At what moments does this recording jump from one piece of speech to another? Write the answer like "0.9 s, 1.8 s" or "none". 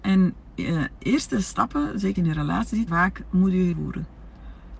1.0 s, 2.2 s, 2.9 s, 3.7 s